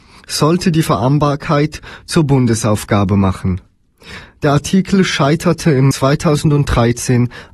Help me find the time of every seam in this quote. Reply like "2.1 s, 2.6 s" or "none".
5.9 s